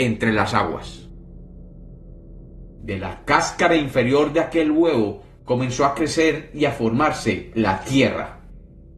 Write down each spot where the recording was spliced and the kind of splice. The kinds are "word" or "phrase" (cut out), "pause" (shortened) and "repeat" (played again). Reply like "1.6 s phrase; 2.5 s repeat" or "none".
none